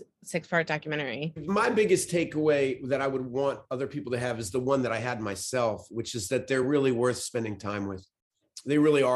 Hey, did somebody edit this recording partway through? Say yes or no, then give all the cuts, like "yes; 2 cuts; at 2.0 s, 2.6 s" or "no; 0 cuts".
no; 0 cuts